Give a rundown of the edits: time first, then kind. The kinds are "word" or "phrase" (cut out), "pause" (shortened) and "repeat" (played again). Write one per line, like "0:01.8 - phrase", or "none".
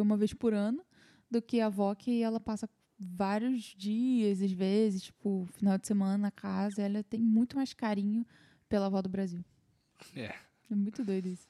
none

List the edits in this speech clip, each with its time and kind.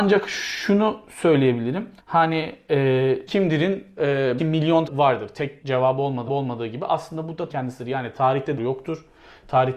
0:02.0 - pause
0:03.3 - word
0:04.4 - word
0:04.9 - phrase
0:05.6 - word
0:06.3 - repeat
0:07.5 - word
0:08.6 - phrase

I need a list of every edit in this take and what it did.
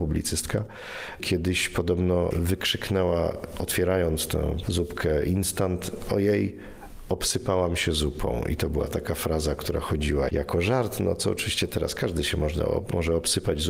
0:10.3 - word

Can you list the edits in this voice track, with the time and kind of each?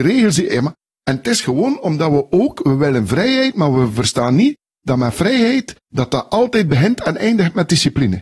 0:05.8 - pause

